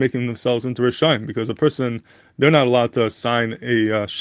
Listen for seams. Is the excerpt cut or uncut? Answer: uncut